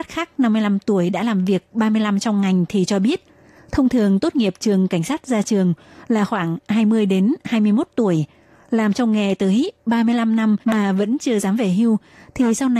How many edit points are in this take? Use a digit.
1